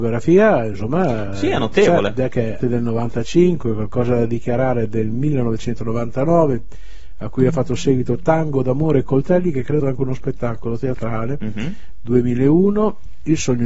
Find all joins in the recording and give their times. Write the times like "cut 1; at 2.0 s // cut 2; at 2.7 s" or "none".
cut 1; at 2.6 s // cut 2; at 9.8 s